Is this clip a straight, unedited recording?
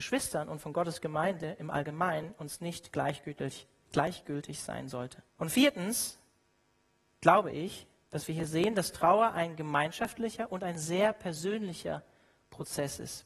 no; 1 cut; at 5.3 s

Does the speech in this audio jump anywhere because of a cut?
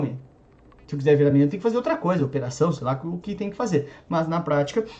no; 0 cuts

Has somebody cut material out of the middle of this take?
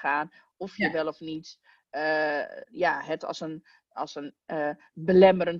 no; 0 cuts

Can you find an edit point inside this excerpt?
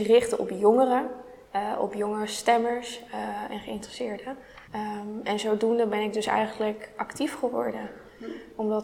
yes; 1 cut; at 4.6 s

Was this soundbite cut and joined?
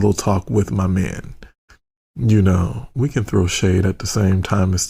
no; 0 cuts

